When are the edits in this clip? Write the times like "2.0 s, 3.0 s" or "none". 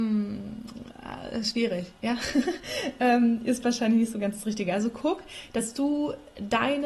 none